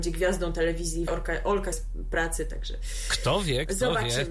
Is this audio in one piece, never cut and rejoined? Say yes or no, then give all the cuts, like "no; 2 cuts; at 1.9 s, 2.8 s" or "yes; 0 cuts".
no; 2 cuts; at 1.1 s, 1.7 s